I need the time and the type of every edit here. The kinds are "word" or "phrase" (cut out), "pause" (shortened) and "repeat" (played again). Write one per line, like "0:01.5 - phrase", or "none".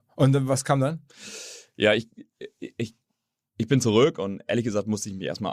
none